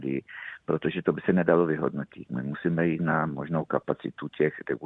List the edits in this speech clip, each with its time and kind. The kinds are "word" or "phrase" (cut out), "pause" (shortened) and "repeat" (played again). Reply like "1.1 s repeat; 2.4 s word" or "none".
none